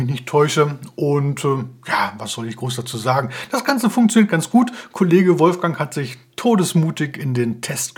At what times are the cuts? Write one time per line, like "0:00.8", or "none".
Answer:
none